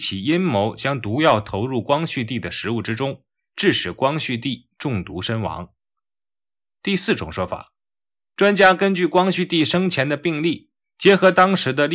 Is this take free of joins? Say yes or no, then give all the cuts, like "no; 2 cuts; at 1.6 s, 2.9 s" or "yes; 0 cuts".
yes; 0 cuts